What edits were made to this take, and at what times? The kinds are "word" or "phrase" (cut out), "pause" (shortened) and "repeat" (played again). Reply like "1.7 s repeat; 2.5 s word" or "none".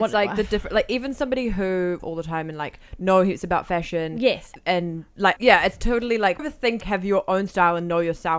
2.0 s phrase; 4.6 s pause; 5.4 s phrase; 6.4 s word; 6.8 s word